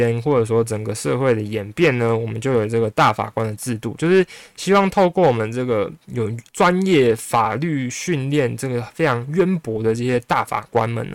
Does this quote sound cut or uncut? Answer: cut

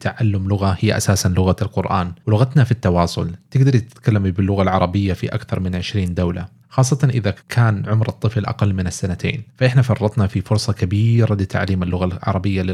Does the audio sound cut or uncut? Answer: cut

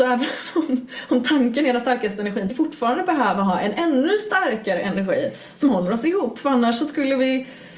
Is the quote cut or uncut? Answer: cut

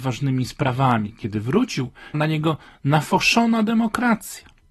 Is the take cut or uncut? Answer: cut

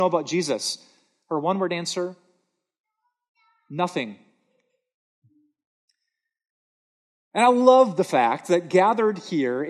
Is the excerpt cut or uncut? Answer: uncut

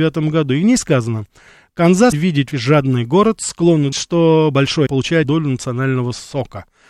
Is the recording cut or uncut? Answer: cut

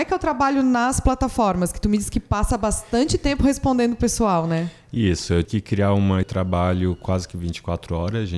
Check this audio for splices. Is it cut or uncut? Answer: cut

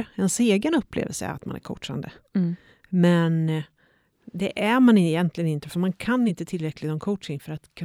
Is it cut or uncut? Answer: uncut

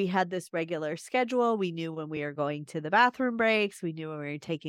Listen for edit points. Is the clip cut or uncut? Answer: uncut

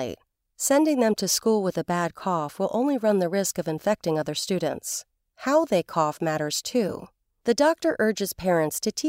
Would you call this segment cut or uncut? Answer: uncut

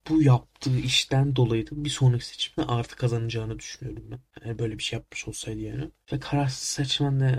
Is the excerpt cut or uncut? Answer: uncut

